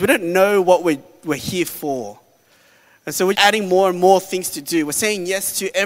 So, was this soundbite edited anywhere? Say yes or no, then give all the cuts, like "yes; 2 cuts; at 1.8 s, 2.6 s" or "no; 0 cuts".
yes; 1 cut; at 3.3 s